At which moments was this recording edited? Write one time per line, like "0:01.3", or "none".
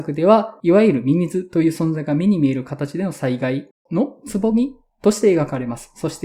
none